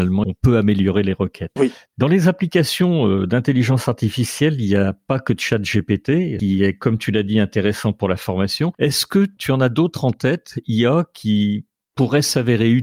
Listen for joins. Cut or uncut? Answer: uncut